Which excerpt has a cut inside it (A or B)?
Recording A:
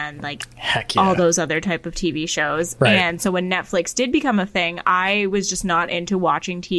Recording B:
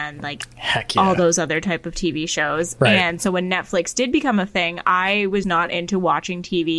B